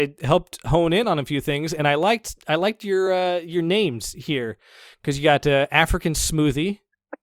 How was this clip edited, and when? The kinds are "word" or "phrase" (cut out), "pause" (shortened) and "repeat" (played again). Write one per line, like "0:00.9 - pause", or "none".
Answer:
none